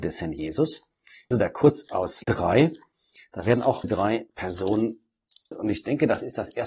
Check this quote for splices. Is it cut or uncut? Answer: cut